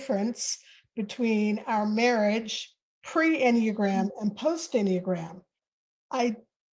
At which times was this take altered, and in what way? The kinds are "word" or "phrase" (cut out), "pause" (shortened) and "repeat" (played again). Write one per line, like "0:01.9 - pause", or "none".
none